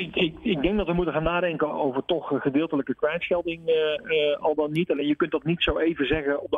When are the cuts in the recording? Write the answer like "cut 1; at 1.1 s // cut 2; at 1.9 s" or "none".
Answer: cut 1; at 1.7 s